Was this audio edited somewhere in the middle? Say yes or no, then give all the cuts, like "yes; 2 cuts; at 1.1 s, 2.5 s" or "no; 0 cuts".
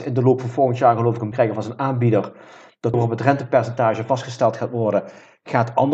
yes; 2 cuts; at 1.3 s, 2.9 s